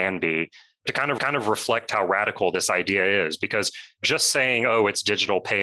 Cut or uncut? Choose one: cut